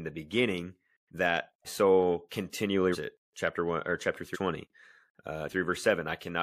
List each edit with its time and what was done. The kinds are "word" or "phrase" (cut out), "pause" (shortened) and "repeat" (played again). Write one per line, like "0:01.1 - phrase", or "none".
0:01.6 - word
0:02.9 - word
0:04.3 - word
0:05.5 - word

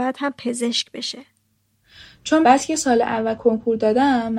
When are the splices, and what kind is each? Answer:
0:02.4 - word

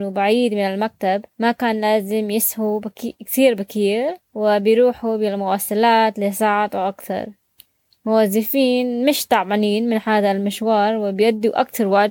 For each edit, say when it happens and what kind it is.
0:01.3 - pause
0:04.2 - pause

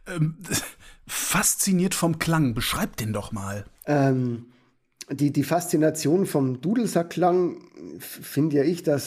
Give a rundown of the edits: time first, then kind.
0:03.7 - pause

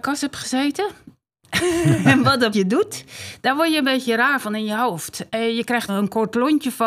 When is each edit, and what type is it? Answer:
0:02.5 - word
0:05.9 - word

